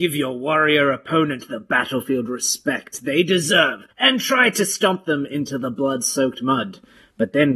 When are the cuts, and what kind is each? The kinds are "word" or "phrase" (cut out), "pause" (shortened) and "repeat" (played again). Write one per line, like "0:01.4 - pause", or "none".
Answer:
0:03.9 - pause